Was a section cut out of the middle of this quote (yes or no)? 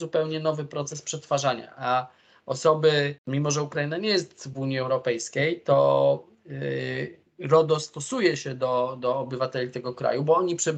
yes